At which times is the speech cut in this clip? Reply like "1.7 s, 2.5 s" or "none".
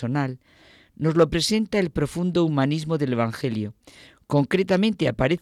none